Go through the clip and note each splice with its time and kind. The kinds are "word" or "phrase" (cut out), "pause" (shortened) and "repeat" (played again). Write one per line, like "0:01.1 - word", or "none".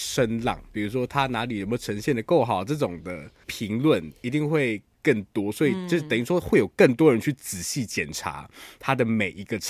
none